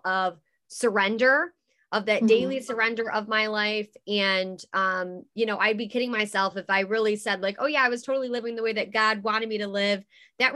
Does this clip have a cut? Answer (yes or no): no